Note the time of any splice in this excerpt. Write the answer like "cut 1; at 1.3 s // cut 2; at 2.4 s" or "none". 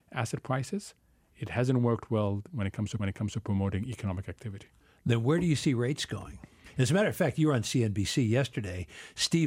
cut 1; at 3.0 s